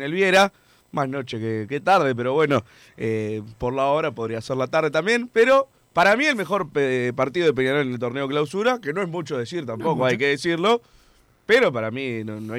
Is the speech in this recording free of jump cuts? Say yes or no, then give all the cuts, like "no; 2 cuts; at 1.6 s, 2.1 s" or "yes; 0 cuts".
yes; 0 cuts